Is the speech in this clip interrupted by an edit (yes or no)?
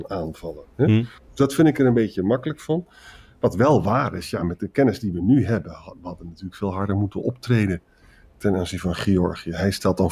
no